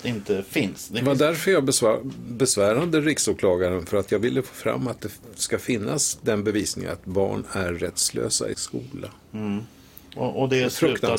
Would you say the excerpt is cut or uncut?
cut